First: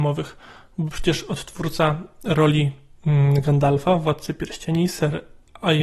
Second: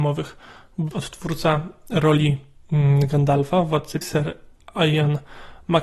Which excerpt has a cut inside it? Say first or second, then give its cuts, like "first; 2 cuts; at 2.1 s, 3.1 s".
second; 2 cuts; at 0.9 s, 4.0 s